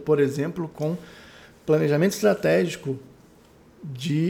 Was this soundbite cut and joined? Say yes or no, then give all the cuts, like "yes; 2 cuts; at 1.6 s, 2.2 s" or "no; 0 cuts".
no; 0 cuts